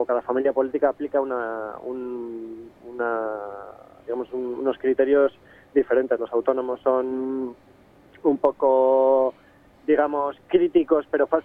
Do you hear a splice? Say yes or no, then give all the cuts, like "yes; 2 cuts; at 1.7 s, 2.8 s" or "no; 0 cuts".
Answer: no; 0 cuts